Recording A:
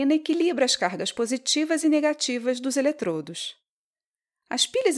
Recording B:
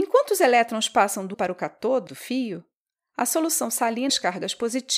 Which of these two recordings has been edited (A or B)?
B